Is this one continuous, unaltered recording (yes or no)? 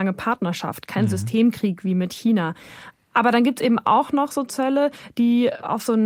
yes